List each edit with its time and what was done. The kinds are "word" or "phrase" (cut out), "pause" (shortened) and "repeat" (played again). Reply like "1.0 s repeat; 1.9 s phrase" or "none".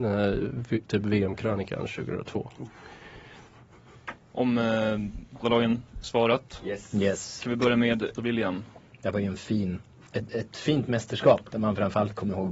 4.2 s pause; 5.4 s word; 8.2 s word